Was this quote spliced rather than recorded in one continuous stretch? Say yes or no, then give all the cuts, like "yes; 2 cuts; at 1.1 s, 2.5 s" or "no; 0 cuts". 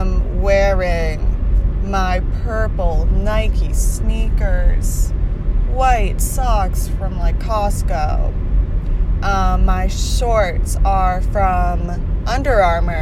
no; 0 cuts